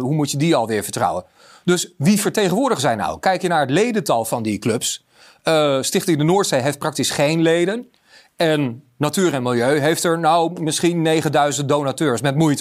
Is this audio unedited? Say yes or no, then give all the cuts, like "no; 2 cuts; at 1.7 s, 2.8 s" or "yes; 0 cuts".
yes; 0 cuts